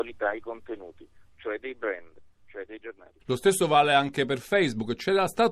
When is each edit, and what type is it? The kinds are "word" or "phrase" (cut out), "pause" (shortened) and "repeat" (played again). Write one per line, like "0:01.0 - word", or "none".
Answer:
0:03.2 - pause